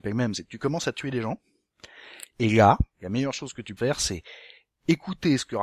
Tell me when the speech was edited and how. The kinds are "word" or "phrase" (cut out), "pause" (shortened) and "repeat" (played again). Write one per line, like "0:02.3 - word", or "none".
0:02.9 - pause
0:03.8 - word